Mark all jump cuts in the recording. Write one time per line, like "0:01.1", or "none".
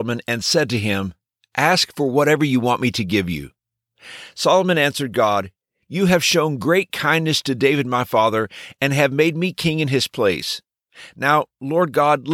none